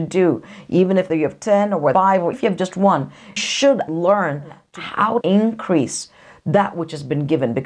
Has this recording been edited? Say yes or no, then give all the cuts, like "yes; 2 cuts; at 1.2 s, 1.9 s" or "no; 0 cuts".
yes; 6 cuts; at 1.1 s, 1.9 s, 2.3 s, 3.4 s, 3.9 s, 5.2 s